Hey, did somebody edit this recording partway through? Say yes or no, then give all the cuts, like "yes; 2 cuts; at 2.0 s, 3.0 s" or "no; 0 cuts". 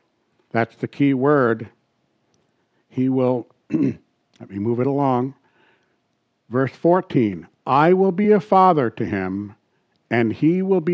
no; 0 cuts